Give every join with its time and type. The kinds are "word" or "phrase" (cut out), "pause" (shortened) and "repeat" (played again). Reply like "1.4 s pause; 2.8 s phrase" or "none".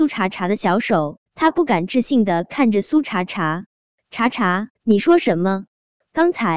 1.3 s pause; 4.7 s pause